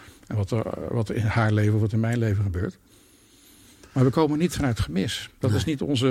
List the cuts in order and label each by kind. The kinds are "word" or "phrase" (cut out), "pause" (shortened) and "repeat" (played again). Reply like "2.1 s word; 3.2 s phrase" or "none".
none